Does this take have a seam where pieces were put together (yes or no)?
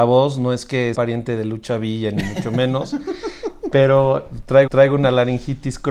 yes